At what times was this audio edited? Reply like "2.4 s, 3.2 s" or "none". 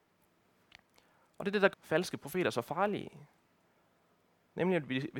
1.7 s